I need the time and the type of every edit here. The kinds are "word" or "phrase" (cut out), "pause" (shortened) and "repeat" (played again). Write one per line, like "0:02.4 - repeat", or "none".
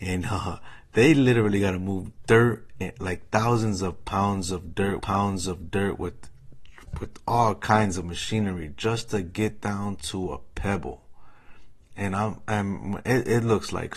0:05.0 - repeat